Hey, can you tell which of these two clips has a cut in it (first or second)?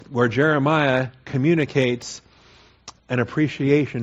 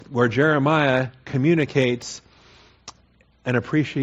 first